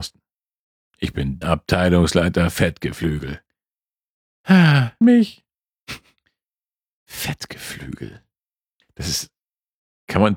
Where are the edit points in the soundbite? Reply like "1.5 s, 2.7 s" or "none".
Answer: 1.4 s, 5.0 s